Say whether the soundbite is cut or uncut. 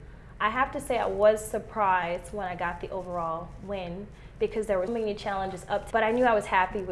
cut